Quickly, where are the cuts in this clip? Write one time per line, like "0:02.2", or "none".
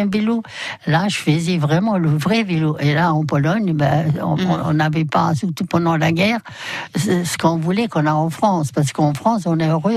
none